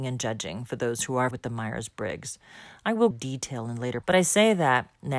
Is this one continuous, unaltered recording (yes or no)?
no